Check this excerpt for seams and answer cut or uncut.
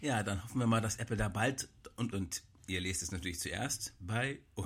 cut